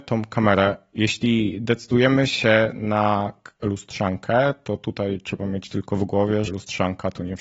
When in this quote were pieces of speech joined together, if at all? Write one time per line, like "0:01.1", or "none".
0:06.5